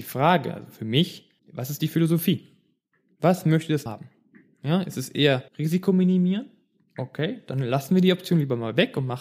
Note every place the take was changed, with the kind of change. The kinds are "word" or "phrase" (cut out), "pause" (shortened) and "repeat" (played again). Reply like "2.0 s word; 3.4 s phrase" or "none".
1.4 s pause; 3.9 s word; 5.5 s pause